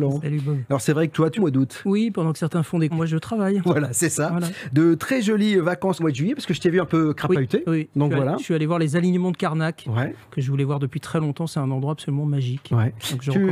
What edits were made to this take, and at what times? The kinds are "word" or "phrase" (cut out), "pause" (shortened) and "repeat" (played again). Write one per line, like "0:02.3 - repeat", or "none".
0:01.4 - phrase
0:02.9 - word
0:06.0 - phrase